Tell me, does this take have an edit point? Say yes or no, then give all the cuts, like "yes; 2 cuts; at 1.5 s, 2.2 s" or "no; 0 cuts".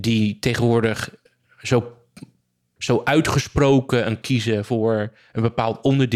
yes; 2 cuts; at 2.8 s, 4.2 s